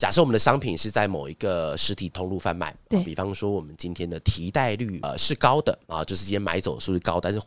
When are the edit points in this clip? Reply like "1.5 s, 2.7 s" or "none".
5.9 s

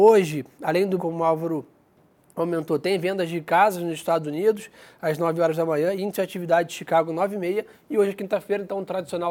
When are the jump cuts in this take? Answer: 1.0 s

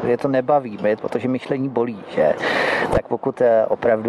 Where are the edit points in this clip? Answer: 1.0 s

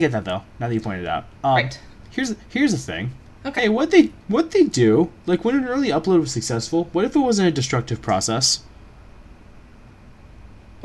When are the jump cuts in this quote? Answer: none

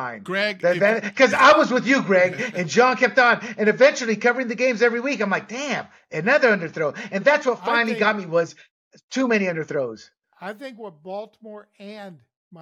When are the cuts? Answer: none

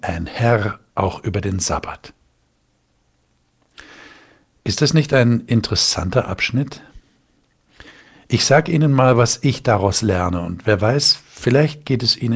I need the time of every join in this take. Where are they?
none

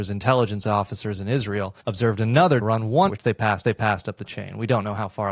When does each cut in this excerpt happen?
1.8 s, 2.6 s, 3.1 s, 3.6 s

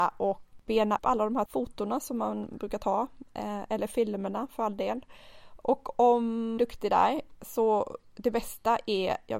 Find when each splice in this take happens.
1.0 s, 1.5 s, 6.6 s

